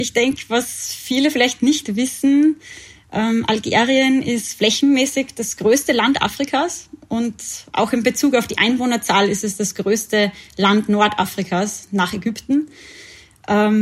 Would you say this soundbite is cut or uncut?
uncut